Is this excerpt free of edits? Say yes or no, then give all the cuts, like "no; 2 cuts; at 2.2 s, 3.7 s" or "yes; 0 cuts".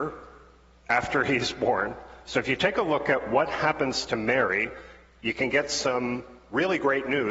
yes; 0 cuts